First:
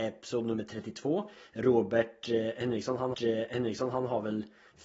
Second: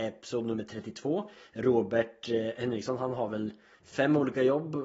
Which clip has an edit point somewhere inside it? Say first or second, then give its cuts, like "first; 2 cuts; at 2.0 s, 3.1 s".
first; 1 cut; at 3.1 s